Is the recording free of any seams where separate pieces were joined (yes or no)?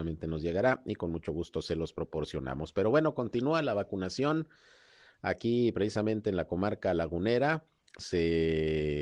yes